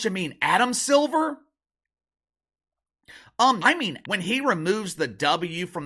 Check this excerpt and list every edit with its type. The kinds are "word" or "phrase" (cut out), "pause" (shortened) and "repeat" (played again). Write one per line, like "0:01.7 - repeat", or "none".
0:03.6 - word
0:04.0 - word